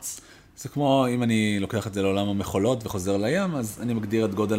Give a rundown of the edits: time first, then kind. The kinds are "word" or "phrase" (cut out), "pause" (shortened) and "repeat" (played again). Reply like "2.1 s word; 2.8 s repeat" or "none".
none